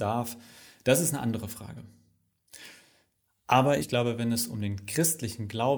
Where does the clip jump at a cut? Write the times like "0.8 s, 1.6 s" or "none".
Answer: 3.8 s